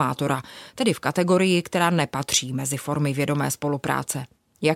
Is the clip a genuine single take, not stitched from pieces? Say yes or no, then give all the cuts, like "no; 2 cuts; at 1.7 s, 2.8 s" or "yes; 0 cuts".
yes; 0 cuts